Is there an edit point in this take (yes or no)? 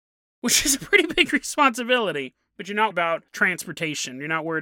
yes